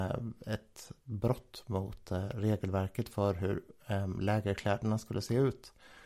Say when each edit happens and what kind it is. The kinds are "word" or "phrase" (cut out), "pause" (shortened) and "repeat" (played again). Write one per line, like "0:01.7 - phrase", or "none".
none